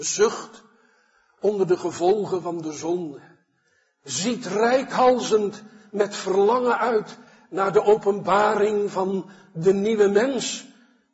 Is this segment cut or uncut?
uncut